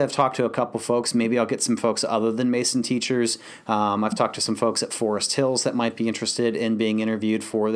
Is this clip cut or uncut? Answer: uncut